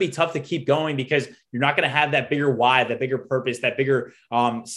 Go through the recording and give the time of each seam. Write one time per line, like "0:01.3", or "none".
none